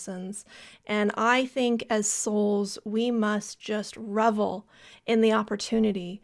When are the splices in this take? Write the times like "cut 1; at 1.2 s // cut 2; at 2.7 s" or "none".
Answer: none